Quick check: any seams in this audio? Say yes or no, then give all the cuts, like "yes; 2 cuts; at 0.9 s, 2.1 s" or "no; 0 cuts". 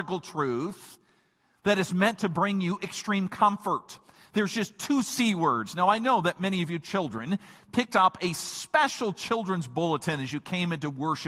no; 0 cuts